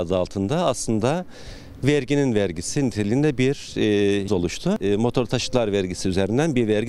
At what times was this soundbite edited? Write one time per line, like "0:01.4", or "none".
0:04.3